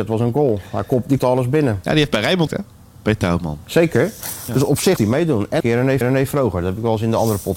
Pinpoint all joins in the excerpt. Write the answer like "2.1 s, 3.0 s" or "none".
1.2 s, 2.5 s, 5.0 s, 5.6 s, 6.0 s